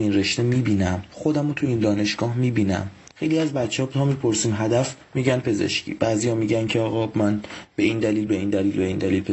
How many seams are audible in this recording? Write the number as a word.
zero